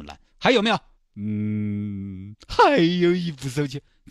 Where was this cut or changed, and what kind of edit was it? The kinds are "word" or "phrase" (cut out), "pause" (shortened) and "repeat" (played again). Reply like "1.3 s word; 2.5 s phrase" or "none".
1.0 s pause